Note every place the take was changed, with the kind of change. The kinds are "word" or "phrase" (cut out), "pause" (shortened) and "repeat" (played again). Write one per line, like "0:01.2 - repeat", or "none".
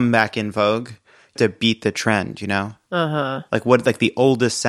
0:01.4 - word